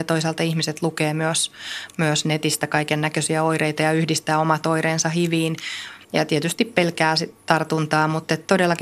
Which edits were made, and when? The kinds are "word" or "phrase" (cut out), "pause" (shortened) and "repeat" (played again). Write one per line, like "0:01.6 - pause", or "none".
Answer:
0:06.0 - pause

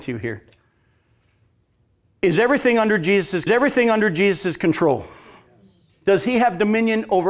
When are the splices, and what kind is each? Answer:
0:03.5 - repeat

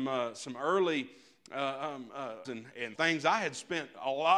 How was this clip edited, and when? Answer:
0:02.4 - word
0:02.9 - word

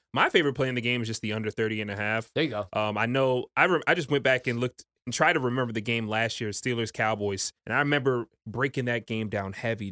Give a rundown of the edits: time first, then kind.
0:07.6 - pause

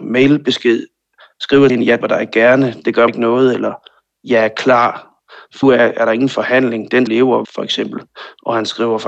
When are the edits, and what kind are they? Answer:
0:01.7 - word
0:02.0 - word
0:03.1 - word
0:05.6 - word
0:07.1 - word
0:07.4 - word

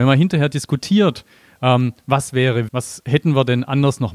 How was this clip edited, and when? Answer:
0:02.7 - word

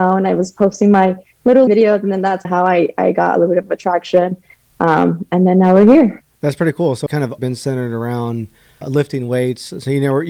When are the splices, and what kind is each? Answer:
0:01.7 - word
0:02.4 - word
0:07.1 - word
0:07.4 - word
0:08.8 - word

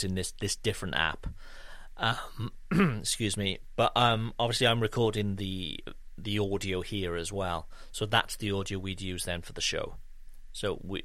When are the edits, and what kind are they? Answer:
none

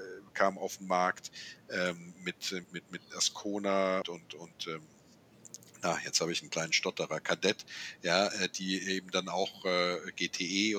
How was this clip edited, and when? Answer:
0:02.6 - word
0:04.0 - word

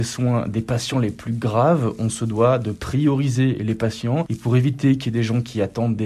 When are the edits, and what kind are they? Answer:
none

